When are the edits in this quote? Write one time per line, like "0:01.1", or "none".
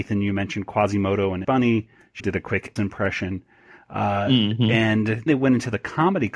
0:01.4
0:02.2
0:02.8
0:05.3

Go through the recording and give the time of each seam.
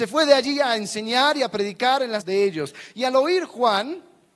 0:02.2

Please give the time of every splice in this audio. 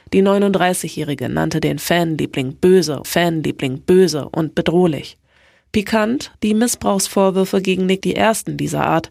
0:03.0
0:06.3
0:08.0

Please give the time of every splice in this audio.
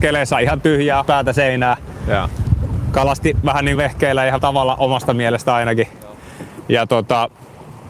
0:01.0
0:03.8
0:04.4

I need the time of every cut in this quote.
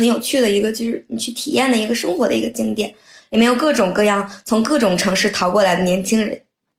none

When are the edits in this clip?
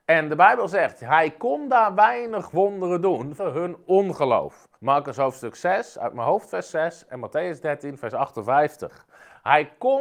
0:03.4
0:04.8

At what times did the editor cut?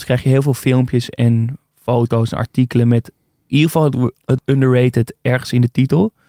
0:04.4

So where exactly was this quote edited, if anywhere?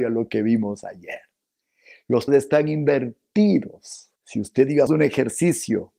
0:02.3
0:04.2
0:04.9

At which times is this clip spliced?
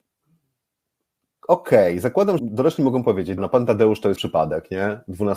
0:02.4
0:03.4
0:04.2

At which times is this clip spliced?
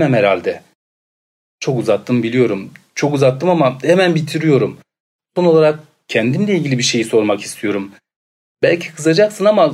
none

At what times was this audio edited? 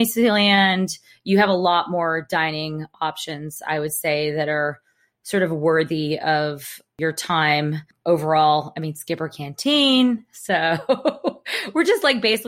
none

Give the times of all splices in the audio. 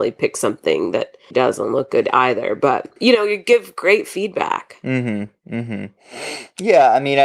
0:01.3

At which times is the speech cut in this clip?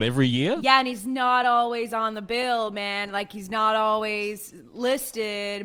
none

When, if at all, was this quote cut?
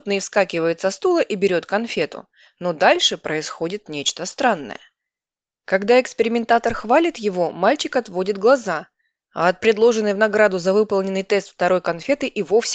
none

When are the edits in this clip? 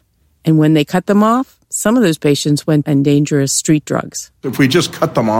0:01.6
0:02.8

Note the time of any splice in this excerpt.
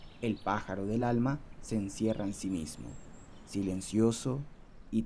none

